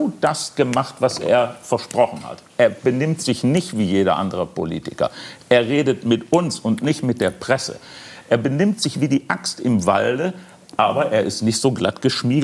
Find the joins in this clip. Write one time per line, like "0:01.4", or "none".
none